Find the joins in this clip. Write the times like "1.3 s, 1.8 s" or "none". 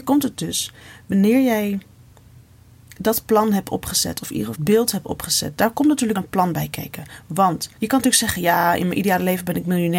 4.5 s, 6.2 s, 7.8 s